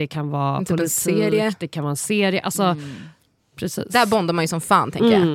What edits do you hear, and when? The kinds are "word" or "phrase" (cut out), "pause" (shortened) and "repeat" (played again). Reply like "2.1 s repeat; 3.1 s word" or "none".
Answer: none